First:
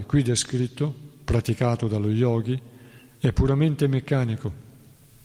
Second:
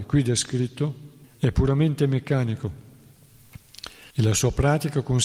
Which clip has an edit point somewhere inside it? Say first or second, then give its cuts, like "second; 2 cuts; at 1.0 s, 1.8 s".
second; 2 cuts; at 1.2 s, 4.1 s